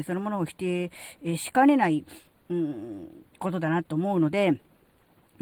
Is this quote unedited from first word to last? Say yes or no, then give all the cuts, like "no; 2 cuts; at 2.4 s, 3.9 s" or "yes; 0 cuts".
yes; 0 cuts